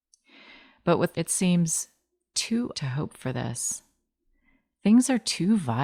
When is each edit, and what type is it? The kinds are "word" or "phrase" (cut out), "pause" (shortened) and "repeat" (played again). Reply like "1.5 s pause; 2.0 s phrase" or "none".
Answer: 1.1 s phrase; 2.7 s word